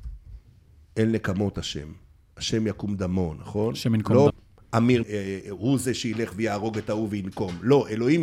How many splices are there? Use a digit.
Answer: 2